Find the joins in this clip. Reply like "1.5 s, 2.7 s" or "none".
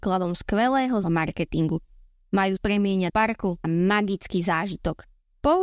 1.0 s, 2.6 s, 3.1 s, 3.6 s